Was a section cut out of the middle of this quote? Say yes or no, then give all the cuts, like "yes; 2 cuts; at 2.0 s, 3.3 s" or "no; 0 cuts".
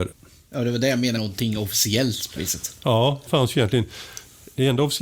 yes; 3 cuts; at 1.2 s, 2.4 s, 3.3 s